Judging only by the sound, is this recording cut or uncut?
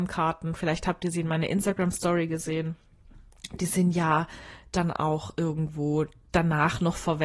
uncut